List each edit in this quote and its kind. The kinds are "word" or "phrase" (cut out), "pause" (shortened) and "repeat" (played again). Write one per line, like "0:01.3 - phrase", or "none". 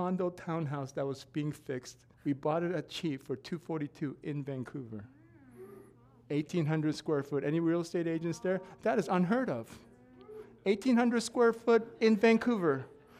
0:02.1 - pause